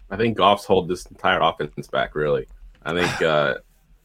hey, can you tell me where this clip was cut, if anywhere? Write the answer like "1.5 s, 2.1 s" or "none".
2.7 s

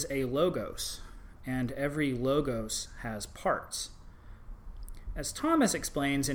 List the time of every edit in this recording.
none

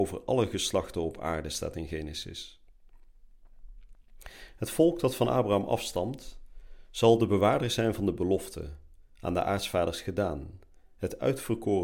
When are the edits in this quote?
none

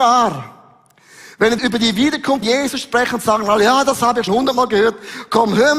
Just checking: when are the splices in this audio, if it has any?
1.6 s, 2.4 s, 4.3 s

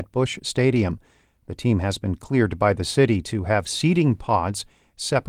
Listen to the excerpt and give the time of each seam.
none

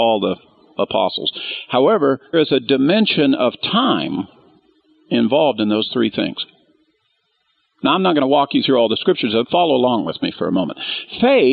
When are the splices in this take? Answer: 2.3 s, 9.4 s, 10.3 s

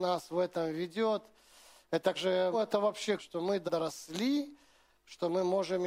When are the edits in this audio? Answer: 2.2 s, 2.5 s, 3.2 s, 3.7 s

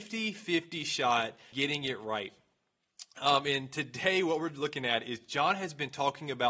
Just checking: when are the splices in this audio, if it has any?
1.5 s

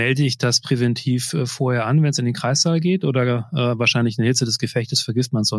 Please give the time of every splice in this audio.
none

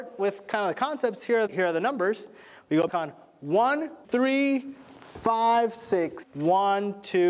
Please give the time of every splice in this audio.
1.5 s, 2.9 s, 4.0 s, 6.2 s

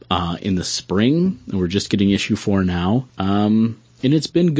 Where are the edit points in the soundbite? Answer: 3.1 s

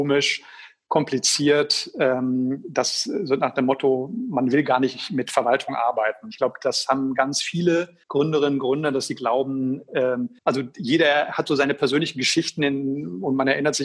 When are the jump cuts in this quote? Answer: 8.0 s, 10.4 s

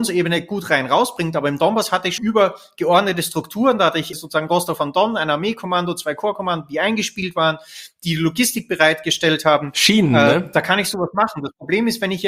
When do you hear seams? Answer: 2.2 s, 4.1 s

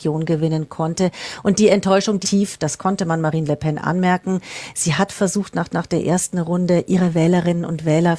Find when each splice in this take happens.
2.2 s, 5.7 s

